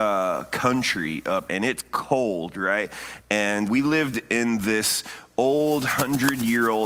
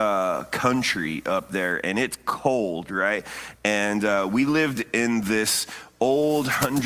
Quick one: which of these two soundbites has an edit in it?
first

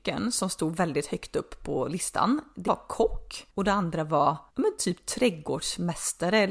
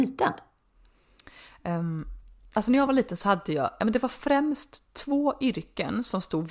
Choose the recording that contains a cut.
first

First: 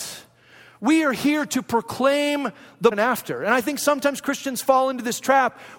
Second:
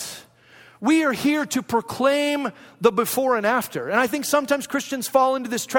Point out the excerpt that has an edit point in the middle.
first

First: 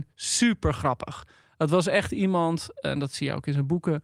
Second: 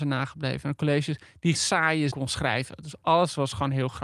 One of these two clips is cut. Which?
second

